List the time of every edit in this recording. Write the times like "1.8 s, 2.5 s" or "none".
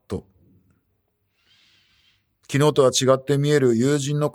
none